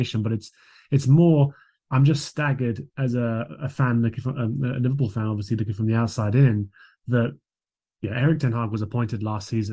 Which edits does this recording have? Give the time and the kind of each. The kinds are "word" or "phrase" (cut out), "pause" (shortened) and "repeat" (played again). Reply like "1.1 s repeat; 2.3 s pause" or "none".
none